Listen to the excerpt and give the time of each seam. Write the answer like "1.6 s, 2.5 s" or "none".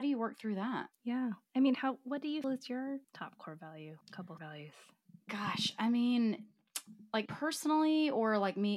0.9 s, 2.4 s, 3.0 s, 4.0 s, 4.4 s, 5.2 s, 7.3 s